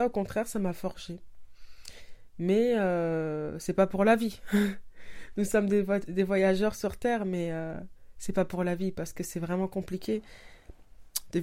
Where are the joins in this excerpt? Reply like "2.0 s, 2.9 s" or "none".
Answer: none